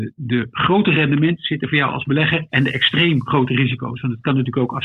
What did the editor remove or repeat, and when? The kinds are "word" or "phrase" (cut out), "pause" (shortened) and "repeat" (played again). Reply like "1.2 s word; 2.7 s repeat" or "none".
none